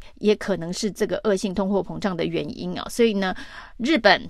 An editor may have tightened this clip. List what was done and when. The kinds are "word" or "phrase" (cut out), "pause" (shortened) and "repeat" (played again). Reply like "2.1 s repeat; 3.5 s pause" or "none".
none